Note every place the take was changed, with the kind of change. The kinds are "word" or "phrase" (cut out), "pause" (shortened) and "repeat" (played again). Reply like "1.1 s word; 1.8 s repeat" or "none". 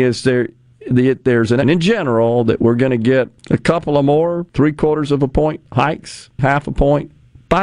1.6 s word; 3.4 s pause; 4.5 s pause; 6.4 s word